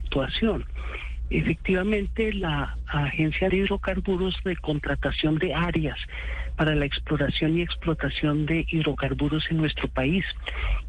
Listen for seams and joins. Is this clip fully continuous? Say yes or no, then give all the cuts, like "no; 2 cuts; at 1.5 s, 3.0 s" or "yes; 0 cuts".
no; 2 cuts; at 3.5 s, 4.5 s